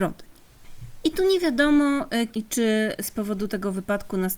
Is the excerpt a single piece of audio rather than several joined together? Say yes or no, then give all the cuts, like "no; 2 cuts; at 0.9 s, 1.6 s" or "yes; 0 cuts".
no; 1 cut; at 2.3 s